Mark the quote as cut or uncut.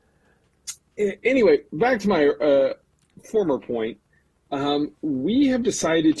uncut